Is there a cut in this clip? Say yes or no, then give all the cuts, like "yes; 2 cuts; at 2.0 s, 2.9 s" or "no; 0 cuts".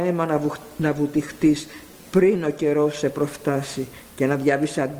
no; 0 cuts